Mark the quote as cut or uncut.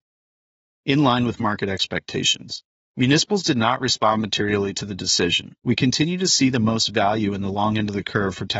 cut